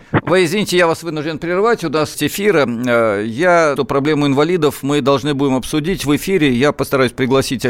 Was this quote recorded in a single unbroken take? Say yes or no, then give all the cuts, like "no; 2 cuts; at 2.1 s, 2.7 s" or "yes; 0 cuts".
no; 2 cuts; at 2.1 s, 3.8 s